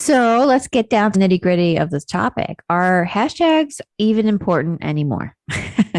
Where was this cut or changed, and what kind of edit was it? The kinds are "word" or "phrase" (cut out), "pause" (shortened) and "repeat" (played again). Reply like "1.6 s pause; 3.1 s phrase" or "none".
1.1 s word; 3.9 s pause